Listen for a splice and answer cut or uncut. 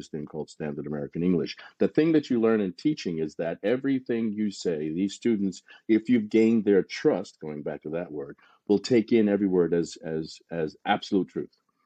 uncut